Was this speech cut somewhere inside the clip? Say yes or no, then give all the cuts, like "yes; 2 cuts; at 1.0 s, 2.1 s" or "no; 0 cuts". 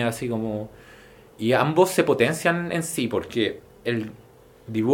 no; 0 cuts